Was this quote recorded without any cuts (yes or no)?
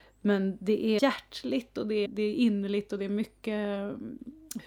no